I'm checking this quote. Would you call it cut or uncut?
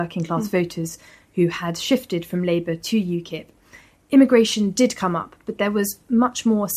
uncut